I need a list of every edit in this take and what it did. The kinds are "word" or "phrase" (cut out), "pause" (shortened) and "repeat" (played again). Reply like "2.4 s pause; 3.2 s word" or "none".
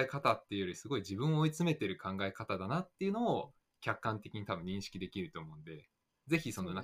none